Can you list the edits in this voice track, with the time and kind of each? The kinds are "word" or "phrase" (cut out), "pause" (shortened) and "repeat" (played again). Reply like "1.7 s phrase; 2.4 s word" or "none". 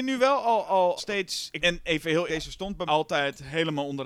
1.0 s word; 1.6 s word; 2.3 s word; 2.9 s word